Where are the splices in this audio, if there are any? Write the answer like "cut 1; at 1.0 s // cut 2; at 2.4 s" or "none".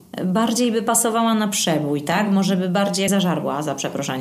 cut 1; at 3.1 s